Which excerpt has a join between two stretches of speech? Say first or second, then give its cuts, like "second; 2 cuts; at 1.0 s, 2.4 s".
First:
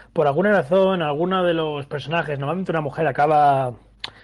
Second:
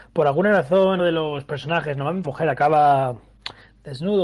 second; 2 cuts; at 1.0 s, 2.2 s